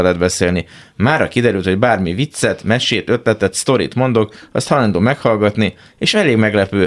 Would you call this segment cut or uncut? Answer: uncut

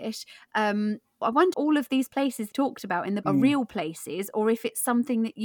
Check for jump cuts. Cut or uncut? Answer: cut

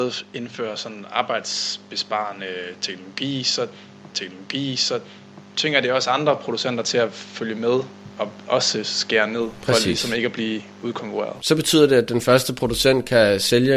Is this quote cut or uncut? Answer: cut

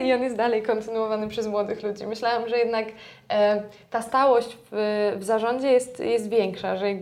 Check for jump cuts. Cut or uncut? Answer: uncut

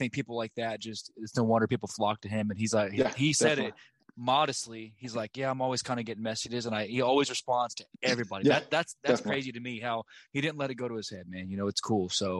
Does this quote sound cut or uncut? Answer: uncut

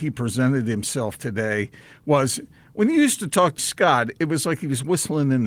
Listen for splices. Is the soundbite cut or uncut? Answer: cut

